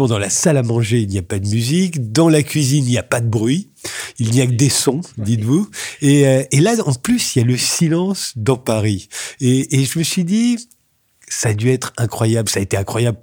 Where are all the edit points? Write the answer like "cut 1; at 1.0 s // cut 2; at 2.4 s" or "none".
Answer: none

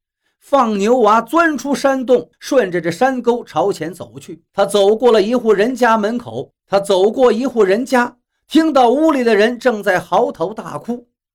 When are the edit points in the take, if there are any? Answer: cut 1; at 2.3 s // cut 2; at 4.5 s // cut 3; at 6.6 s

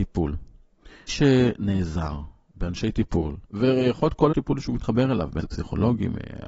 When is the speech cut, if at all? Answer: cut 1; at 1.1 s // cut 2; at 3.4 s // cut 3; at 4.3 s // cut 4; at 4.6 s // cut 5; at 5.4 s

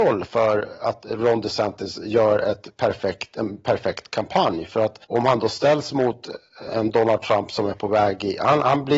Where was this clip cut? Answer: cut 1; at 5.0 s // cut 2; at 6.7 s

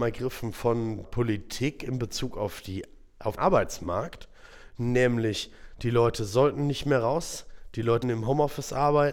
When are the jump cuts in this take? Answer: cut 1; at 1.0 s // cut 2; at 3.4 s // cut 3; at 8.0 s

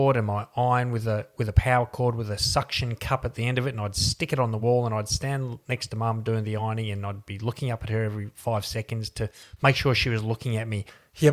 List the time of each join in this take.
none

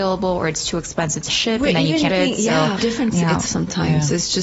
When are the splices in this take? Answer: cut 1; at 1.3 s // cut 2; at 2.1 s // cut 3; at 2.8 s // cut 4; at 3.1 s // cut 5; at 3.5 s

